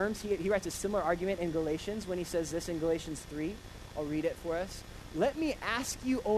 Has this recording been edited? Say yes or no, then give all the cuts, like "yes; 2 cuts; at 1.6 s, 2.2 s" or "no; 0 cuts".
no; 0 cuts